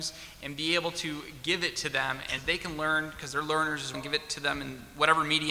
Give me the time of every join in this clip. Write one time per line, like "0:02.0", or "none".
0:02.4
0:03.9